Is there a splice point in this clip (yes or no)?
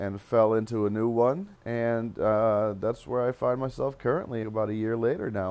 yes